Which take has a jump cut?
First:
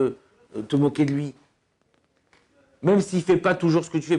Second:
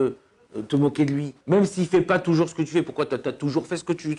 second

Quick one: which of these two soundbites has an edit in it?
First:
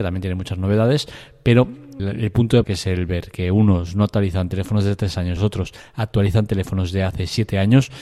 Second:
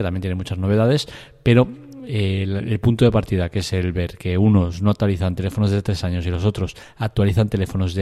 first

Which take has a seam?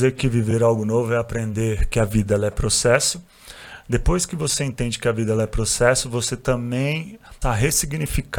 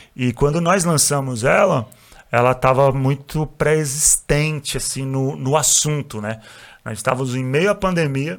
first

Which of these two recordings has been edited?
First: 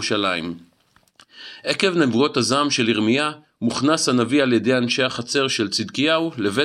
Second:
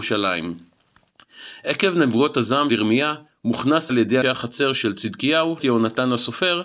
second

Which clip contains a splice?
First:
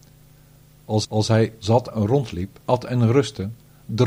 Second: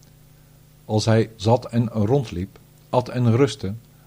first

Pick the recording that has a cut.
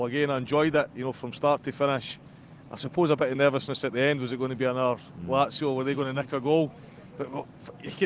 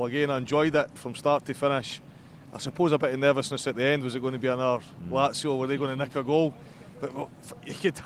second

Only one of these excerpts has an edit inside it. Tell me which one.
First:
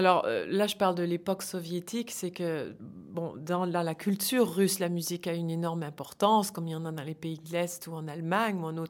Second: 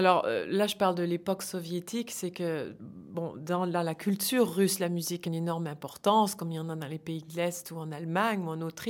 second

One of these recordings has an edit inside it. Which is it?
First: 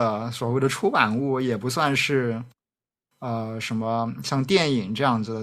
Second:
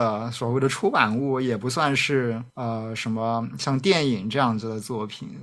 second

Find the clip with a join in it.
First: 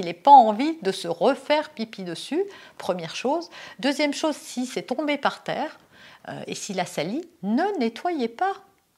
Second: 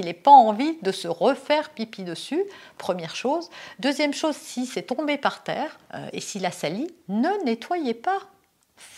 second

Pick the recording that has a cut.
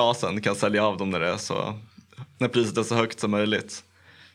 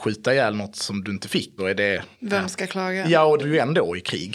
second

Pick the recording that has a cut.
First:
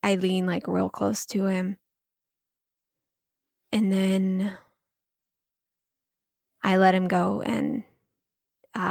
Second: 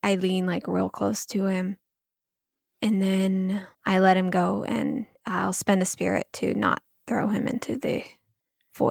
second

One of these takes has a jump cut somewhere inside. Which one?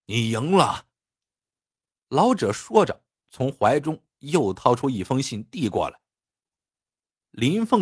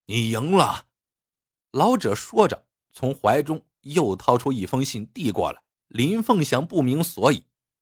second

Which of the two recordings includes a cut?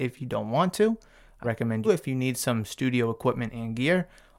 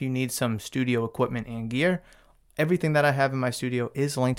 first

